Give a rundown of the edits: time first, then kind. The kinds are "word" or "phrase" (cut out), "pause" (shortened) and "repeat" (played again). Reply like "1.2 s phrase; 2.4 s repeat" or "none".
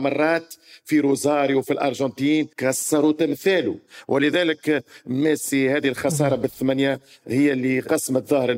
2.5 s pause